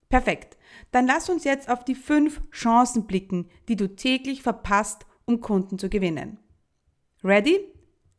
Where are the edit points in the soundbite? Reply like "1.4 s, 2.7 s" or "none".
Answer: none